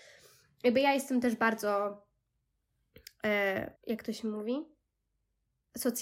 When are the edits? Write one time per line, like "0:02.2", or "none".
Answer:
0:03.8